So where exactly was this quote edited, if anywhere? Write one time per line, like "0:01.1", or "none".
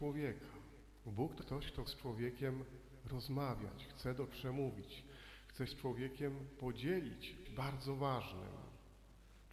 0:01.4
0:01.9
0:04.3
0:05.7
0:07.4